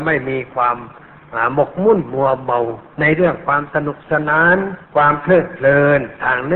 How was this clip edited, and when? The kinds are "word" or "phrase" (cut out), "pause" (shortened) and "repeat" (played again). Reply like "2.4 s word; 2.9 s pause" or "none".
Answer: 4.8 s pause